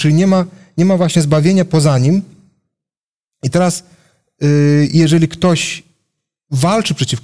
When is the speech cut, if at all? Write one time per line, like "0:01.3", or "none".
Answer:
none